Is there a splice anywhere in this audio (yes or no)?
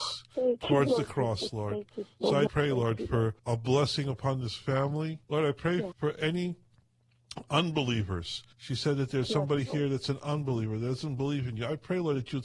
yes